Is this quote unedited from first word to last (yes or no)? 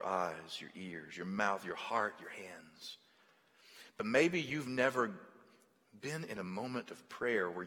yes